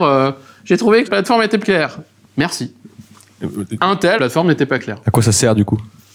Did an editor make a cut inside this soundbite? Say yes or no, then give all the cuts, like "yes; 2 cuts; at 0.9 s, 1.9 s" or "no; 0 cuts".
yes; 3 cuts; at 1.0 s, 1.6 s, 4.2 s